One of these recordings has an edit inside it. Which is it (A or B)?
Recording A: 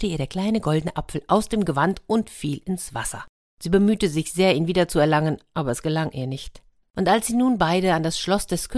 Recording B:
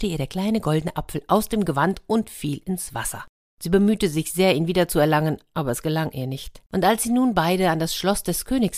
B